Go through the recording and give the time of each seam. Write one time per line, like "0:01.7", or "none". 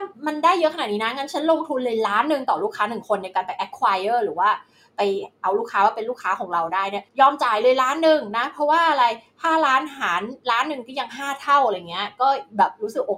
none